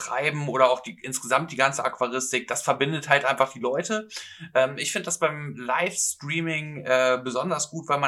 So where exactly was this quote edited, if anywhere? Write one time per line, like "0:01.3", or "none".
none